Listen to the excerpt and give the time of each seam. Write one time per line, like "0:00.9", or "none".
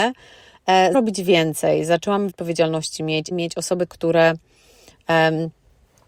0:00.9
0:02.3
0:03.3
0:03.9